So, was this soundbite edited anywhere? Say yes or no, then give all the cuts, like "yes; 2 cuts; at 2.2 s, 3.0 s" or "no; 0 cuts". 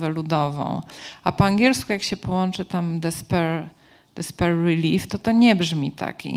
no; 0 cuts